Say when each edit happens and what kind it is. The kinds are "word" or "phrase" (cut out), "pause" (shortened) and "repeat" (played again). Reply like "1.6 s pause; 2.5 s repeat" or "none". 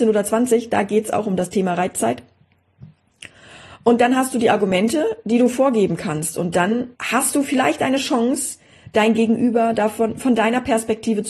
6.9 s pause